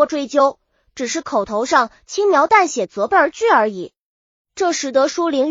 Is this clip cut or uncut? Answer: uncut